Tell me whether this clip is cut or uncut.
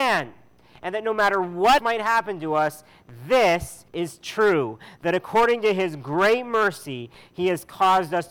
cut